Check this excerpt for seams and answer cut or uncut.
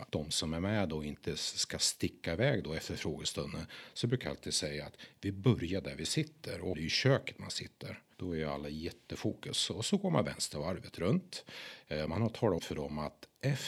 cut